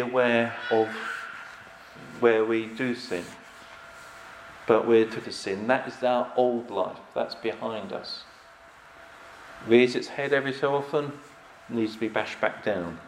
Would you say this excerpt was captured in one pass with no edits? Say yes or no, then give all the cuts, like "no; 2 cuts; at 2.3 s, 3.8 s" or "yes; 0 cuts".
no; 1 cut; at 5.2 s